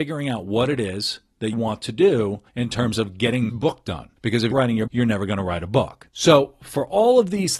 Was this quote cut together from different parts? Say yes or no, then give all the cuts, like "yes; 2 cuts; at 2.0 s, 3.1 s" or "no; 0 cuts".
yes; 7 cuts; at 1.5 s, 2.5 s, 3.5 s, 4.2 s, 4.5 s, 4.9 s, 6.1 s